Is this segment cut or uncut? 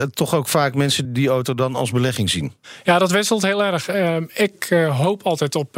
cut